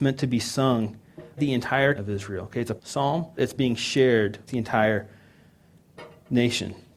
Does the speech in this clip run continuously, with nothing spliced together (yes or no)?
no